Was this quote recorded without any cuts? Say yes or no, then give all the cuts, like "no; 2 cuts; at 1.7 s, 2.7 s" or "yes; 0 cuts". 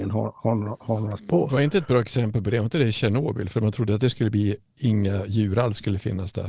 no; 1 cut; at 1.2 s